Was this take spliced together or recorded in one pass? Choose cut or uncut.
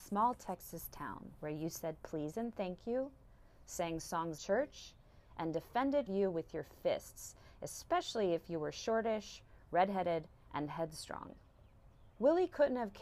cut